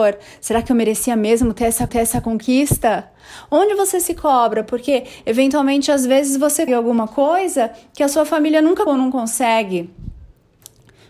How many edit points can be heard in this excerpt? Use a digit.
3